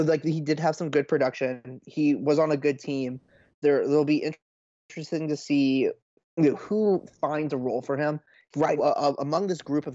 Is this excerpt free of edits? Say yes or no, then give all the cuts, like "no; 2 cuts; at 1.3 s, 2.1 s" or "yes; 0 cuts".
no; 1 cut; at 8.8 s